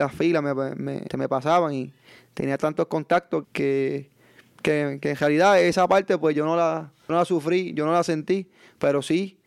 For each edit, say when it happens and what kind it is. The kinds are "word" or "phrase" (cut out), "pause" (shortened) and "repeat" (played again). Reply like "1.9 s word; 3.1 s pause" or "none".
1.1 s word; 3.4 s word; 7.1 s word